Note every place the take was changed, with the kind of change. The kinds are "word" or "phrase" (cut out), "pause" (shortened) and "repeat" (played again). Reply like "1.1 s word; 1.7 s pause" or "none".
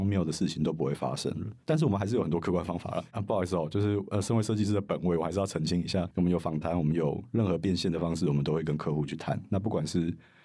1.6 s pause